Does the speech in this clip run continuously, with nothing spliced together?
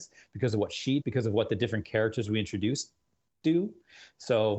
no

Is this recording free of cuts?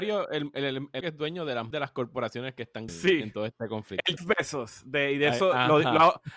no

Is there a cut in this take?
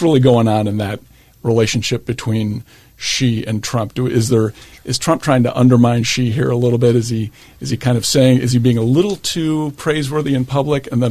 no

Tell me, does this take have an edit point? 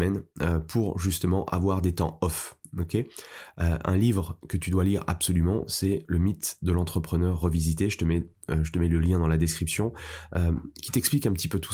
no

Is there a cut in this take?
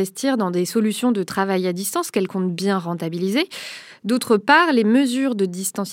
no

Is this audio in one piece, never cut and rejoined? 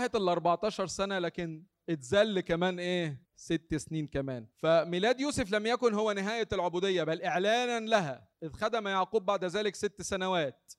no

